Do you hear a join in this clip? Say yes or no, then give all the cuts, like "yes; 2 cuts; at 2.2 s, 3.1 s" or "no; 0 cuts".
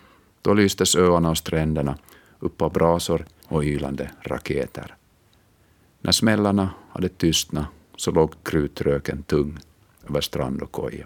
yes; 1 cut; at 3.4 s